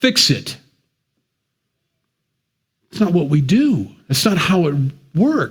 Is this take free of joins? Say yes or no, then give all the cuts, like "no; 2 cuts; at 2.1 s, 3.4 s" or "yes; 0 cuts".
yes; 0 cuts